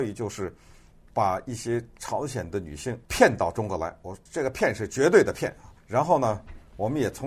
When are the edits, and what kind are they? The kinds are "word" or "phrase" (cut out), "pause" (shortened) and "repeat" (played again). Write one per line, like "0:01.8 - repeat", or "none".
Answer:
0:03.0 - pause
0:04.3 - pause
0:05.8 - pause